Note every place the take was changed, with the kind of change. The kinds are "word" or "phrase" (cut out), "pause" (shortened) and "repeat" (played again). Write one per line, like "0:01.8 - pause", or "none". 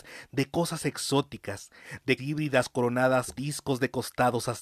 0:02.2 - word
0:03.4 - word